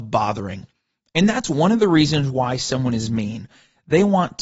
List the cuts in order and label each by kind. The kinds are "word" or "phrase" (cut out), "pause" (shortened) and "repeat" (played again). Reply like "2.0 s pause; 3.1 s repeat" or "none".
none